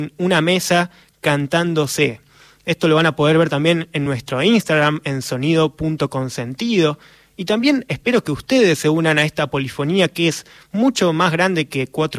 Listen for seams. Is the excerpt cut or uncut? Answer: uncut